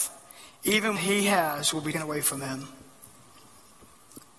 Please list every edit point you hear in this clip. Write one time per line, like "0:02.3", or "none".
0:01.0
0:01.9